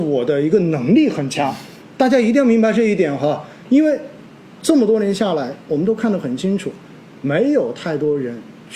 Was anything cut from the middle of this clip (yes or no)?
no